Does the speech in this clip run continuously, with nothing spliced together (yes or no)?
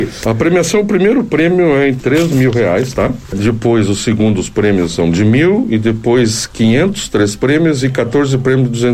yes